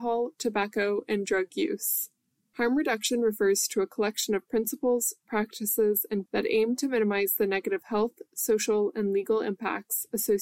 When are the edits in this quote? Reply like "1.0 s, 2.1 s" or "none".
6.3 s